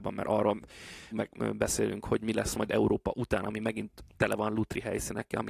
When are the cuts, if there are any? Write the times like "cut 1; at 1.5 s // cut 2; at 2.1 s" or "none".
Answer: cut 1; at 1.1 s